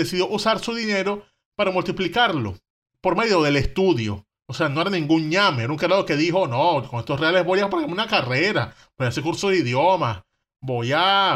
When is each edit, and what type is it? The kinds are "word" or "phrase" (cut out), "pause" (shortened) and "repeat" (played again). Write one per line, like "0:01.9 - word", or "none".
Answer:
none